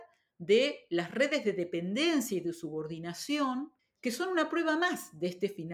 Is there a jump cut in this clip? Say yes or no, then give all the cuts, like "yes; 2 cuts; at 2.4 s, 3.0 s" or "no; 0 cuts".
yes; 1 cut; at 3.8 s